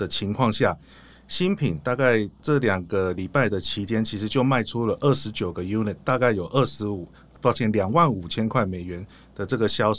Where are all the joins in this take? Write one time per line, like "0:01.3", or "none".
none